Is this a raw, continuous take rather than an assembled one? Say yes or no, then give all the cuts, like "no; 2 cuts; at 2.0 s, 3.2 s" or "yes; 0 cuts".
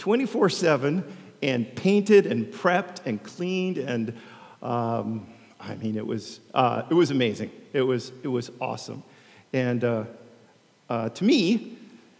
yes; 0 cuts